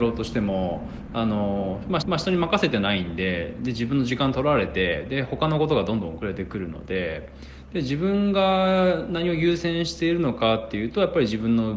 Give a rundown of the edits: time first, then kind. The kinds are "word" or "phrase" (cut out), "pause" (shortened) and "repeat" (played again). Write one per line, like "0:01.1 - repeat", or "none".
0:02.0 - repeat